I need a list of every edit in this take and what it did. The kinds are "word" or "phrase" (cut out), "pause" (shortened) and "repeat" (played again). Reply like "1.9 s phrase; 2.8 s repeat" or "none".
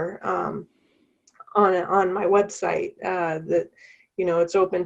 none